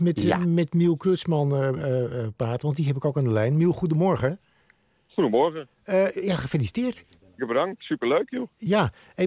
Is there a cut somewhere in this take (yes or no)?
yes